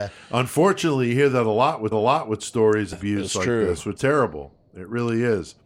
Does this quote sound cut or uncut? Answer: cut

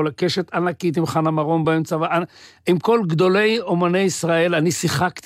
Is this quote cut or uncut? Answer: uncut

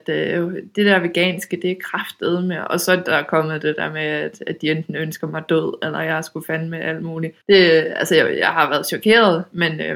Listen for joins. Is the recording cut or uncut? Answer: cut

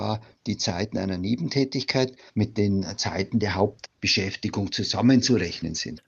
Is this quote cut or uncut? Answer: uncut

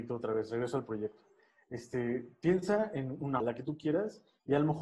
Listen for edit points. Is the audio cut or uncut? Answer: cut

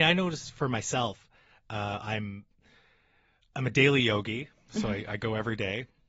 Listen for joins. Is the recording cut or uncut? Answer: uncut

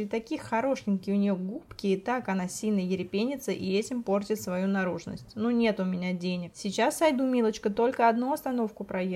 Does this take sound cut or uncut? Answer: uncut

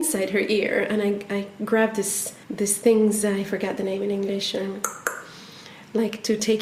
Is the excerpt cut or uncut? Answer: cut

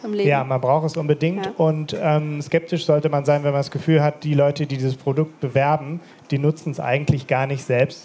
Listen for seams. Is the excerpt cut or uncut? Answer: uncut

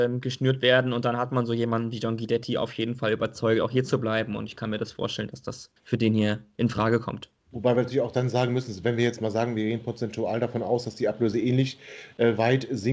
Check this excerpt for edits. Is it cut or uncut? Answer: cut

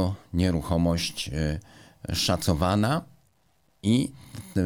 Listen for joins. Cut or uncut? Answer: uncut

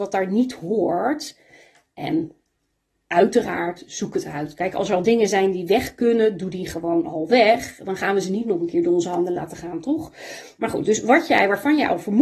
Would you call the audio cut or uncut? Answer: uncut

